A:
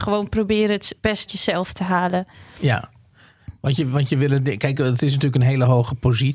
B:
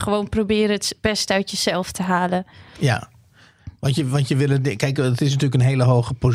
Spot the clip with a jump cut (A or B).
A